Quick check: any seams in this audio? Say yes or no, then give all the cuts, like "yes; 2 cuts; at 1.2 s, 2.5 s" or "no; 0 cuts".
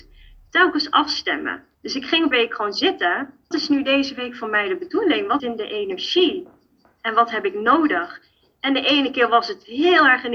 yes; 4 cuts; at 1.7 s, 2.3 s, 3.5 s, 5.4 s